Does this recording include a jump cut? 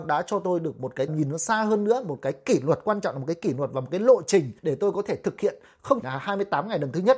yes; 3 cuts; at 1.1 s, 4.6 s, 6.0 s

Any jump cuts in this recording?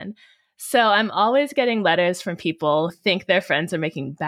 yes; 1 cut; at 2.9 s

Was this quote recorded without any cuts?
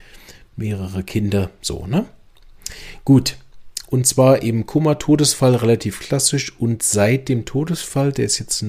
yes; 0 cuts

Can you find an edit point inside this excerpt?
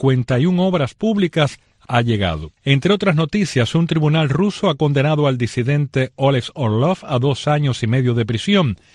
yes; 2 cuts; at 1.8 s, 2.6 s

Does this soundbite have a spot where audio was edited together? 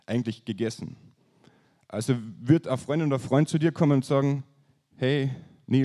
no; 0 cuts

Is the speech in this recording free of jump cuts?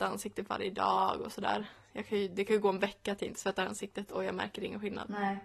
yes; 0 cuts

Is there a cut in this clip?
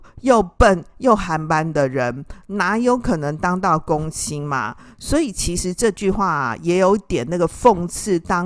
no; 0 cuts

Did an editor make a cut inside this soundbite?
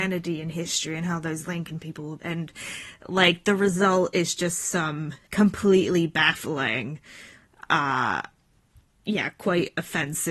yes; 1 cut; at 5.2 s

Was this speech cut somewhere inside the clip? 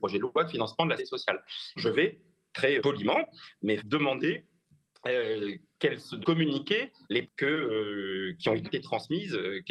yes; 7 cuts; at 1.0 s, 1.8 s, 2.8 s, 3.8 s, 6.2 s, 7.2 s, 8.6 s

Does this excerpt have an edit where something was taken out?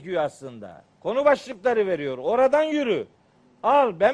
yes; 1 cut; at 0.9 s

